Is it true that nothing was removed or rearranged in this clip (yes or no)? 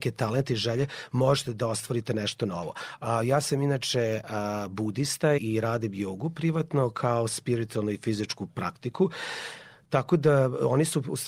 no